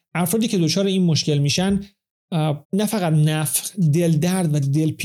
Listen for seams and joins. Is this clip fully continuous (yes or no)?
no